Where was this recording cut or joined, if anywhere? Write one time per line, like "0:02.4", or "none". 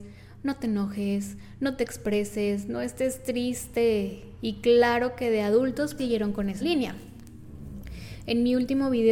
0:06.0
0:06.6